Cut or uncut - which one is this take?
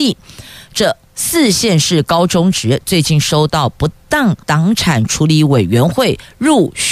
cut